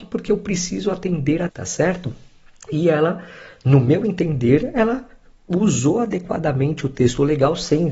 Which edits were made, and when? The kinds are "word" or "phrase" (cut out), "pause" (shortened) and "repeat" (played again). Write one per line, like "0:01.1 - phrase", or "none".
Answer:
0:01.5 - phrase